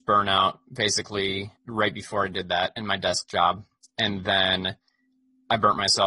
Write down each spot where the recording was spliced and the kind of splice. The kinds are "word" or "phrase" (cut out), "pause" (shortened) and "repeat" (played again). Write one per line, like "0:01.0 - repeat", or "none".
0:01.6 - pause